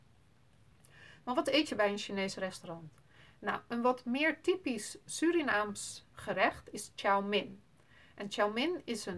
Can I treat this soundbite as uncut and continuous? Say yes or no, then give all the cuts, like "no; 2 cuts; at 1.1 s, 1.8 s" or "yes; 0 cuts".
yes; 0 cuts